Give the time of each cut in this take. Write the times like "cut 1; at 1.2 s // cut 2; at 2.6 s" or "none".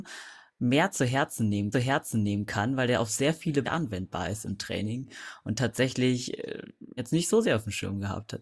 cut 1; at 1.7 s // cut 2; at 3.6 s // cut 3; at 7.0 s